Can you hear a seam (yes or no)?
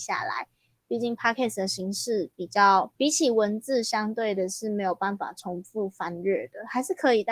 yes